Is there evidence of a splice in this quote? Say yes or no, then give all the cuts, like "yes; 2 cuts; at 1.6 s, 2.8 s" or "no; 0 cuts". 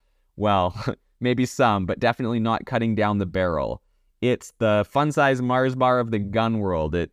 no; 0 cuts